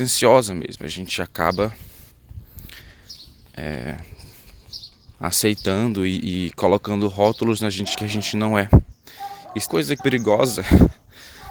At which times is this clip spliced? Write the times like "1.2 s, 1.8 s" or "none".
5.1 s, 7.9 s, 9.7 s, 10.0 s